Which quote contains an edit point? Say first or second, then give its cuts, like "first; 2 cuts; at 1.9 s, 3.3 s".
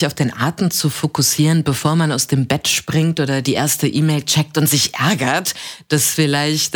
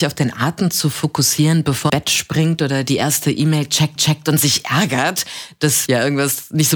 second; 3 cuts; at 1.9 s, 4.0 s, 5.9 s